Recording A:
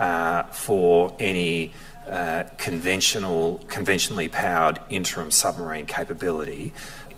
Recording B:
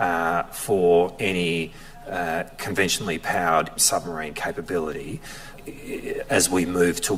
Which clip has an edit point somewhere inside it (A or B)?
B